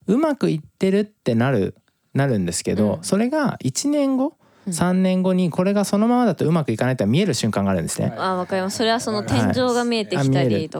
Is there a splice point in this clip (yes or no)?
no